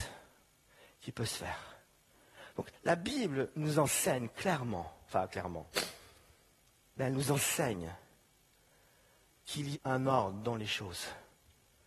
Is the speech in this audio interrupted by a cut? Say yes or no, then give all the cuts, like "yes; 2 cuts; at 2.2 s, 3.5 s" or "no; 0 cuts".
yes; 1 cut; at 9.7 s